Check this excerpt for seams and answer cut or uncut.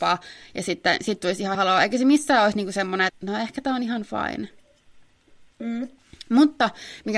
cut